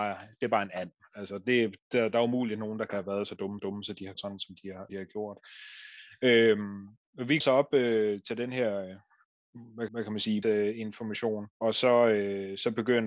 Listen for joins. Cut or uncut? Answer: cut